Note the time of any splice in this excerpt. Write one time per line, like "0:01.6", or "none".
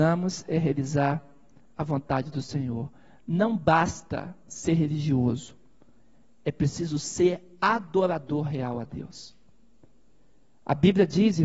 none